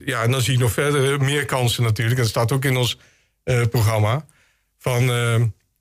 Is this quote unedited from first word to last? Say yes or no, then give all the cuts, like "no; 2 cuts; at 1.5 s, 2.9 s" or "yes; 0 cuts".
yes; 0 cuts